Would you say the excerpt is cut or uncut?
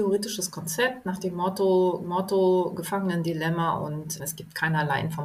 cut